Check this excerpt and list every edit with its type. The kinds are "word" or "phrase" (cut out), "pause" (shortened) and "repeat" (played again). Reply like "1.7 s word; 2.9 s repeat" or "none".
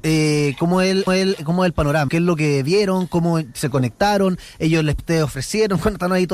1.1 s repeat; 2.1 s word; 5.0 s word